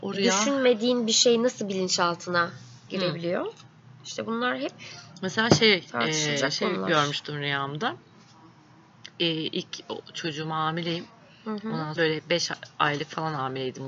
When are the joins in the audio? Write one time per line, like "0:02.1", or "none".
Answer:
0:12.0